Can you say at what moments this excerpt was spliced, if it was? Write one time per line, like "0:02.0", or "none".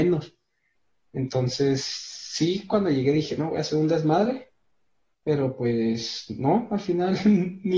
none